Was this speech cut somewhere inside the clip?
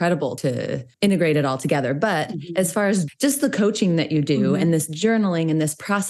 no; 0 cuts

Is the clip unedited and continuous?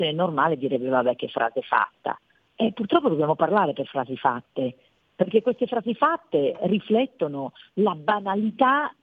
yes; 0 cuts

